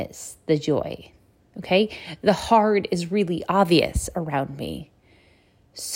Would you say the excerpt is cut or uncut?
uncut